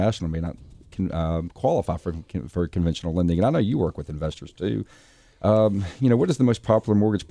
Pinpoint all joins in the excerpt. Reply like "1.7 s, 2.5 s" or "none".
none

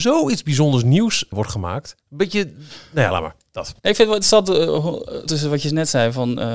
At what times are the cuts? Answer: 1.3 s, 2.0 s, 3.8 s, 5.3 s

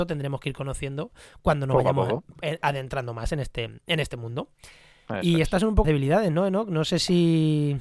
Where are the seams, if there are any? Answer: 5.8 s

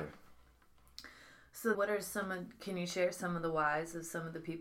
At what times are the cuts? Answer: 1.7 s

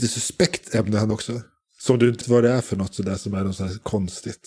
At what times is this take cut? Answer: 1.1 s, 2.2 s

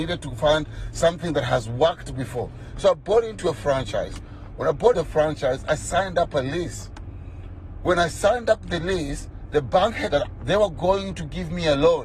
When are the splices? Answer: 4.9 s, 10.1 s

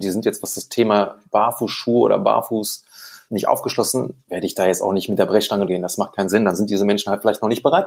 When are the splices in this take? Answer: 1.3 s, 3.3 s, 4.3 s, 5.7 s

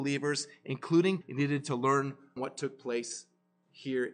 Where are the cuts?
1.2 s, 2.4 s

